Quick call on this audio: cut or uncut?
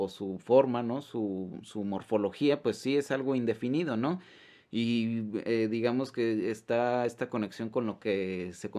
uncut